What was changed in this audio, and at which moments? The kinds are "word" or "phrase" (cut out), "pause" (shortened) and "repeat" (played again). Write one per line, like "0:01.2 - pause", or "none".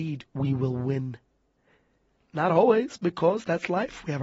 none